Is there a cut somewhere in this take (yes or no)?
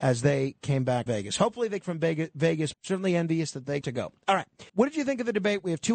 yes